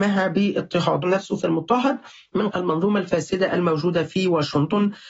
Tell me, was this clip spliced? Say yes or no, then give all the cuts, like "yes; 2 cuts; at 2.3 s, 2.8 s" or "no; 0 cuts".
yes; 3 cuts; at 1.0 s, 1.4 s, 2.5 s